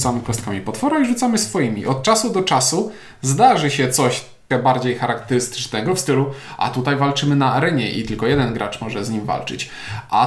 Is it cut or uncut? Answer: cut